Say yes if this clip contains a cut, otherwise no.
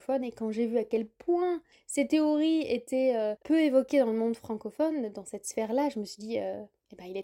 no